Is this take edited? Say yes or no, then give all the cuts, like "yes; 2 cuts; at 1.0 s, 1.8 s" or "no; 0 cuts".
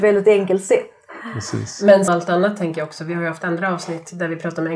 yes; 1 cut; at 2.1 s